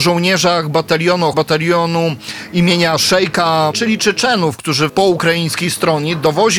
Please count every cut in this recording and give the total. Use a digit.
3